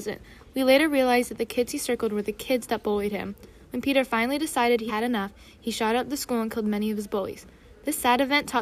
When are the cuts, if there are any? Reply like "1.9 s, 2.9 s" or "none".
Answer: 4.9 s